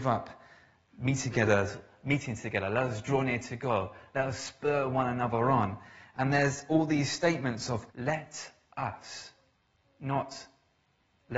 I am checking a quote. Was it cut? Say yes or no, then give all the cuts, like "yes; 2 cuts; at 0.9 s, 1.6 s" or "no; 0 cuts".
yes; 2 cuts; at 7.9 s, 9.5 s